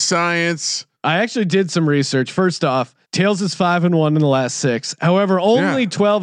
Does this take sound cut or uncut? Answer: cut